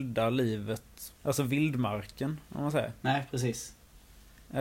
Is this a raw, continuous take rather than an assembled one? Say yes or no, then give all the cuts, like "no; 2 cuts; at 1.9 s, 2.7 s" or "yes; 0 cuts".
no; 1 cut; at 1.1 s